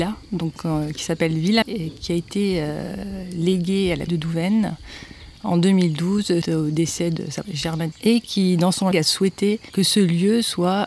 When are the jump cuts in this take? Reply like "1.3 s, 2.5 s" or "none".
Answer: 1.6 s, 4.1 s, 6.4 s, 7.4 s, 7.9 s, 8.9 s